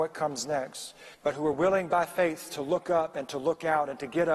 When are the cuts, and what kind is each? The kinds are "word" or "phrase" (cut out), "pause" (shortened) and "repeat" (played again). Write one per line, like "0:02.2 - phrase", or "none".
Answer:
0:01.1 - pause